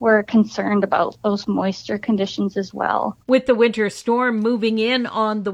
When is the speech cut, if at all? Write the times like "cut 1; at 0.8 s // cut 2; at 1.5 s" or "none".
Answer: cut 1; at 3.2 s